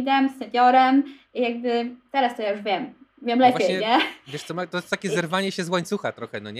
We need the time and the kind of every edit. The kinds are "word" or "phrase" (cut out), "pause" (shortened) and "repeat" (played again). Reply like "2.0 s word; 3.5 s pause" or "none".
none